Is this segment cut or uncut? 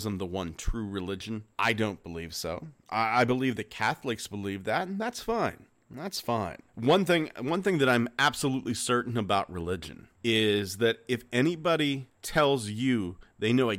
cut